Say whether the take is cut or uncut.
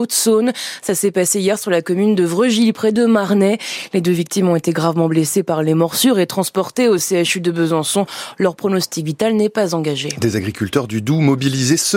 uncut